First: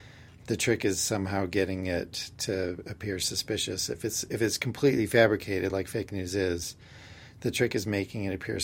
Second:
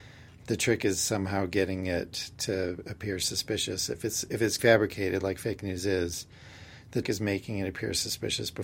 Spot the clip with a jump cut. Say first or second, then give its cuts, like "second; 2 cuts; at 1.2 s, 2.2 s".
second; 2 cuts; at 4.6 s, 7.0 s